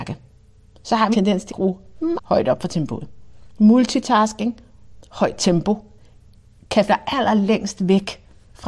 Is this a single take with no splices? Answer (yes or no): no